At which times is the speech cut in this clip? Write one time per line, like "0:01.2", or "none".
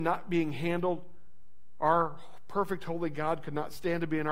none